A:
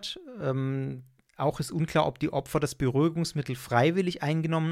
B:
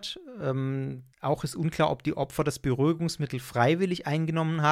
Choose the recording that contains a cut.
B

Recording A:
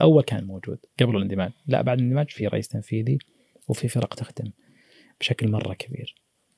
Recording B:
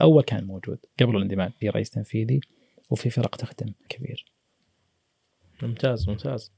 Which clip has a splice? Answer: B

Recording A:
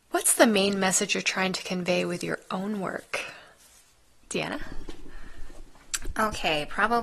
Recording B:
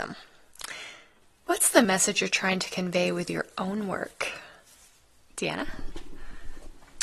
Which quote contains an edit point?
B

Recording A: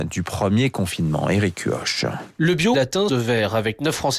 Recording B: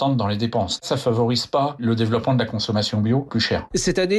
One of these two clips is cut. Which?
A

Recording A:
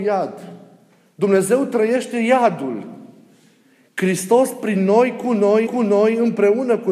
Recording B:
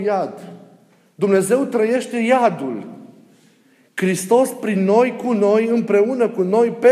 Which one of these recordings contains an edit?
A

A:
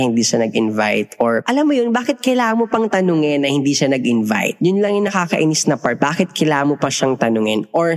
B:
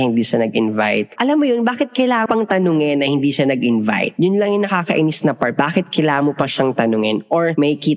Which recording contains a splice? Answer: B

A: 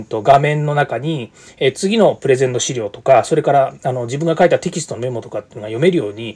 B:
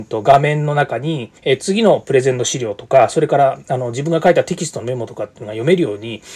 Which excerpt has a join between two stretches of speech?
B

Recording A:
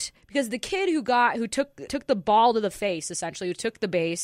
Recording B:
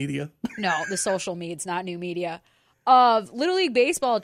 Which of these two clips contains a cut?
A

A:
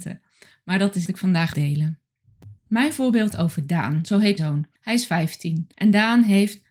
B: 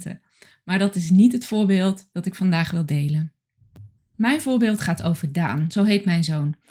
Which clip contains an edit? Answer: A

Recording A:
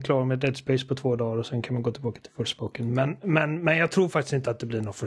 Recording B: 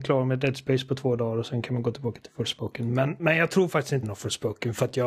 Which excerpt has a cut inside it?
B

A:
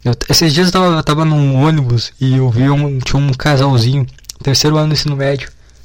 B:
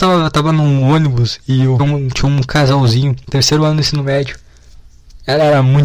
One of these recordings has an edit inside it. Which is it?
B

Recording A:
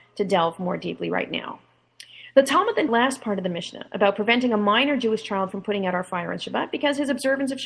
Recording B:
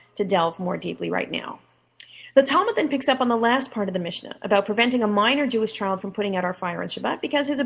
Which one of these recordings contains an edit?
A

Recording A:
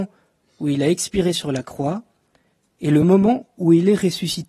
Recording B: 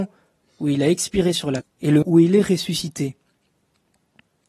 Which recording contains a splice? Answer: B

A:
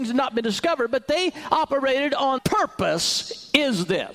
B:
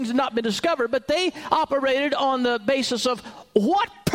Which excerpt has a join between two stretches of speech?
A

